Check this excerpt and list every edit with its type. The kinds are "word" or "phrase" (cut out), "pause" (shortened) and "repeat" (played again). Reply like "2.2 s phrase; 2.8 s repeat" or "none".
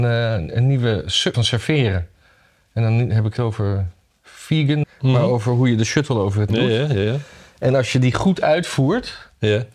1.3 s word; 3.4 s word; 4.8 s word; 6.5 s word